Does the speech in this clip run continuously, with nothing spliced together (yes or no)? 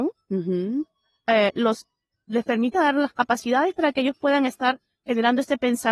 yes